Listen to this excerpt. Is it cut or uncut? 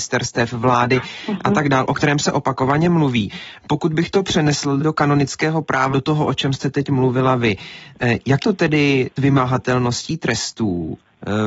cut